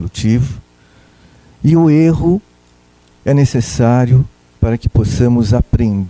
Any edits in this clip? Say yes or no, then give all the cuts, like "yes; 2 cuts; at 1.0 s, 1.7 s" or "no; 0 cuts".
no; 0 cuts